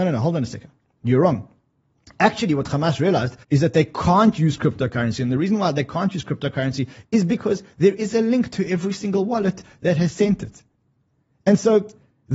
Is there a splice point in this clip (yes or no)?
yes